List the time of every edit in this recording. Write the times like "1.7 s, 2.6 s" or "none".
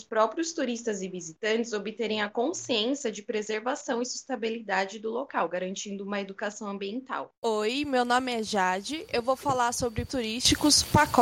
7.3 s, 10.1 s